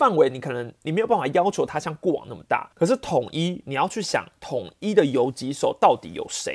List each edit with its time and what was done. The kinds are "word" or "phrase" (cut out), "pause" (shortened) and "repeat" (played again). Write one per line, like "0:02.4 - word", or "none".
0:02.7 - pause